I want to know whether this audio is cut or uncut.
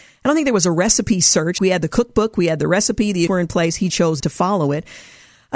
cut